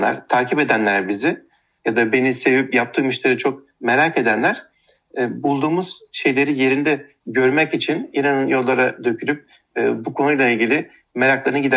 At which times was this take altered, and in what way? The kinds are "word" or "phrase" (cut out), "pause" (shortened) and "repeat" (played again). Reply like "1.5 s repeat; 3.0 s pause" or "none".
none